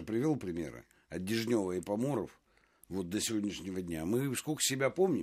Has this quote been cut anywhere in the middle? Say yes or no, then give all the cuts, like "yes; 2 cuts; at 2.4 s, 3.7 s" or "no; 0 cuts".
no; 0 cuts